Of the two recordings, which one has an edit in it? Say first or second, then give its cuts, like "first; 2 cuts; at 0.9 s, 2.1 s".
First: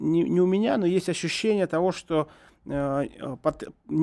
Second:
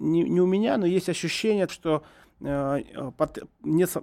second; 1 cut; at 1.7 s